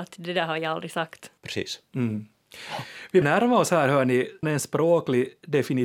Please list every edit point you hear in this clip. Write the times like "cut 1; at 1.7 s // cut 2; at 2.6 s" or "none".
cut 1; at 1.4 s // cut 2; at 3.2 s // cut 3; at 4.4 s